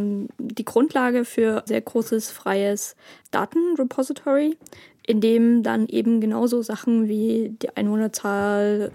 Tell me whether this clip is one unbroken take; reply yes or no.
no